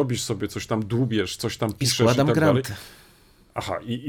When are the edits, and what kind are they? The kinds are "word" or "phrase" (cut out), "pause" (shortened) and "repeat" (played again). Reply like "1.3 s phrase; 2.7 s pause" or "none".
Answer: none